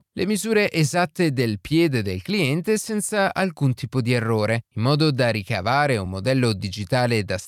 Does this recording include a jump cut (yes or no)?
no